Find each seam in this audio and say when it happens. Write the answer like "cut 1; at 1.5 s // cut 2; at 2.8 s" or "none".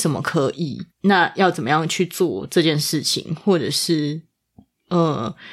cut 1; at 0.9 s